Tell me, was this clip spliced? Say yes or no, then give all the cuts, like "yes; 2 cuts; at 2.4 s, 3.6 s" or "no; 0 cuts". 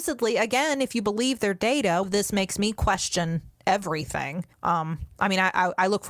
yes; 2 cuts; at 2.0 s, 4.5 s